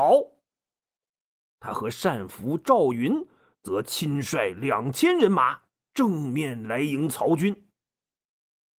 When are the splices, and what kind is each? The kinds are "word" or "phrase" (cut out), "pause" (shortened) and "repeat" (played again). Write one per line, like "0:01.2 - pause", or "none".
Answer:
none